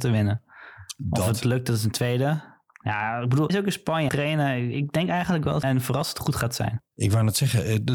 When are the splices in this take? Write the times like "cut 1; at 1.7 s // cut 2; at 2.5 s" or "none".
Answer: cut 1; at 3.5 s // cut 2; at 4.1 s // cut 3; at 5.6 s // cut 4; at 6.9 s